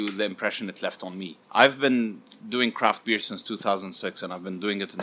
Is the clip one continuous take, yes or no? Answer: no